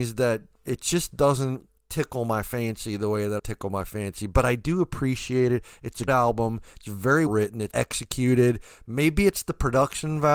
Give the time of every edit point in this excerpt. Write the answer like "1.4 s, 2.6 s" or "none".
1.8 s, 3.4 s, 6.1 s, 7.3 s, 7.7 s